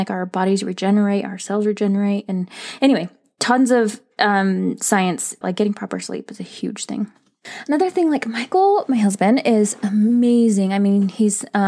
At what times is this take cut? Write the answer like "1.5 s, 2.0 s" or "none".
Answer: 5.4 s